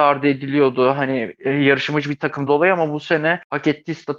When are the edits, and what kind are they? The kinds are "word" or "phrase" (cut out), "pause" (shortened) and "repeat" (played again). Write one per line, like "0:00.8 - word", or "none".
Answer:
0:02.5 - word